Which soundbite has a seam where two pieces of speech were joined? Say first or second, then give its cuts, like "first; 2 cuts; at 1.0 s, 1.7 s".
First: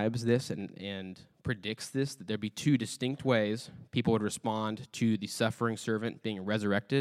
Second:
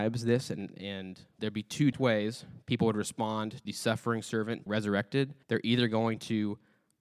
second; 5 cuts; at 1.4 s, 1.9 s, 3.7 s, 4.7 s, 5.4 s